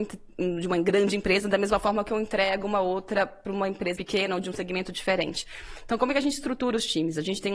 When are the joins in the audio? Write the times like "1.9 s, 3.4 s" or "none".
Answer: 4.0 s